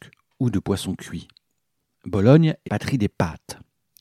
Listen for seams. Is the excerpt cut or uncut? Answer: cut